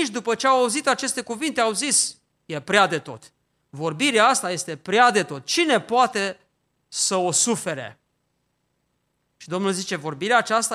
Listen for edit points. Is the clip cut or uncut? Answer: uncut